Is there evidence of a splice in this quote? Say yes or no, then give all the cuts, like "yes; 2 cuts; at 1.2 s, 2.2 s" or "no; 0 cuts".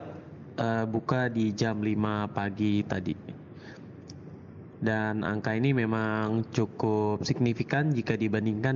no; 0 cuts